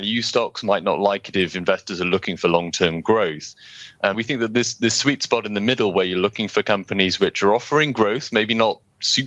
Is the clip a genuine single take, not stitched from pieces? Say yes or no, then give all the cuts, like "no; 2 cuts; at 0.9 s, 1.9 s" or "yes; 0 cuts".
no; 1 cut; at 4.1 s